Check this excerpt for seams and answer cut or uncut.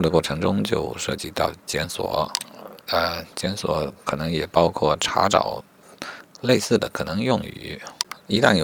cut